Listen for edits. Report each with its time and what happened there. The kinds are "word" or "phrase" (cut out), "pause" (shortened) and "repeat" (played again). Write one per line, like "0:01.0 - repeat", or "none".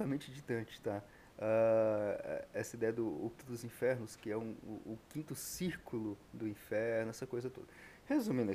0:03.4 - word
0:06.2 - pause

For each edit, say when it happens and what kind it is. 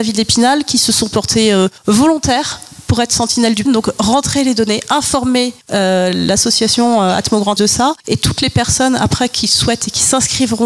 0:01.8 - pause
0:03.7 - word
0:05.6 - pause
0:07.6 - word
0:08.0 - pause

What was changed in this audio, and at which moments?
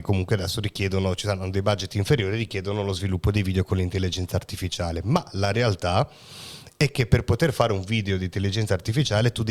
none

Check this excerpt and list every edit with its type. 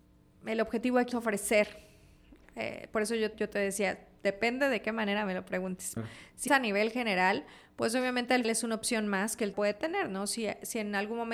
0:01.1 - word
0:03.3 - word
0:06.0 - word
0:06.5 - word
0:08.4 - word
0:09.5 - word

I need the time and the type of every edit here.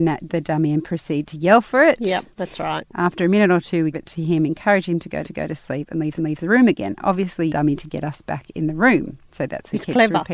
0:02.3 - pause
0:03.9 - phrase
0:05.2 - repeat
0:06.2 - repeat
0:07.5 - phrase

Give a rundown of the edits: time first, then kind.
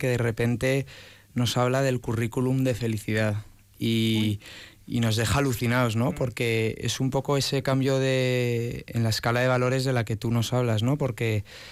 none

